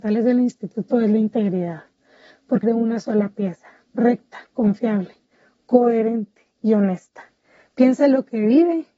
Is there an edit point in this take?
yes; 1 cut; at 2.6 s

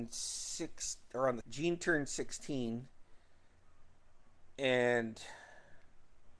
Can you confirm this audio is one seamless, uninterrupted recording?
no; 1 cut; at 1.4 s

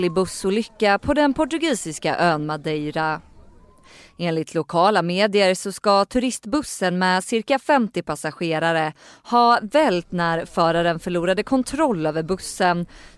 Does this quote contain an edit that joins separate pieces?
no; 0 cuts

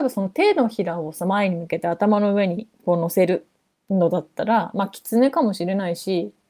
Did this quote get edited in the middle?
yes; 1 cut; at 3.7 s

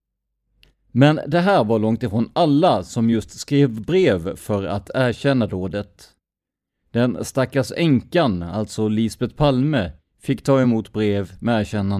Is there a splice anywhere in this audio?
no; 0 cuts

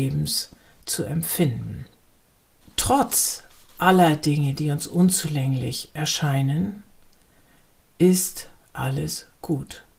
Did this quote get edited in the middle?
no; 0 cuts

